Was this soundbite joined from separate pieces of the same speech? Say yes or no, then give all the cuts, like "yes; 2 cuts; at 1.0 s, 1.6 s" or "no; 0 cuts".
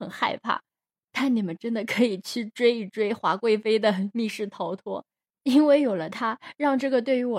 no; 0 cuts